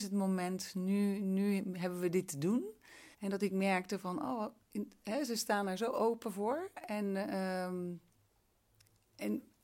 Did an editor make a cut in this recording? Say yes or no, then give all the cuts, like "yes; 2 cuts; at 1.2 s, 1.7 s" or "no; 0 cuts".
yes; 1 cut; at 3.1 s